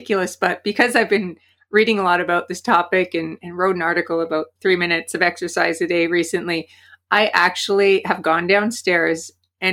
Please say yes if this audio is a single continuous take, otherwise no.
yes